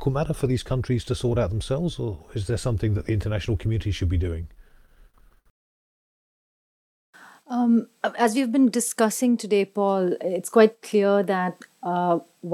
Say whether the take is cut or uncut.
uncut